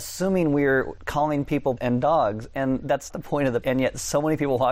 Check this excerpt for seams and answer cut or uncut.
cut